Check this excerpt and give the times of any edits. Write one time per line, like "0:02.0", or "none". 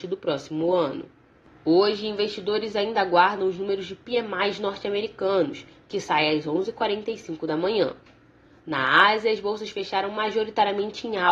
none